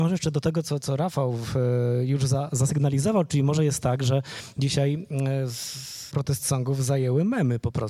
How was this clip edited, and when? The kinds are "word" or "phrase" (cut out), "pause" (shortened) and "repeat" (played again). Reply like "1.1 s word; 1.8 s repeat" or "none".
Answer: 6.1 s word